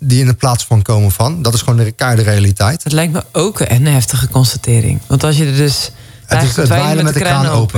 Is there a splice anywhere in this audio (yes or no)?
no